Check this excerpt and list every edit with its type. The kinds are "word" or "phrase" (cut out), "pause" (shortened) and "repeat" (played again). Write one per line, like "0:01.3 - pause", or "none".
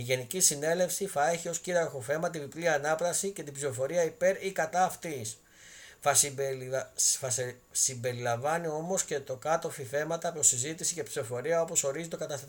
none